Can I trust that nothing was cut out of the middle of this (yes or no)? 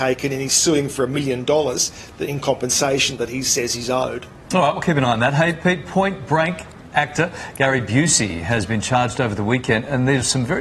yes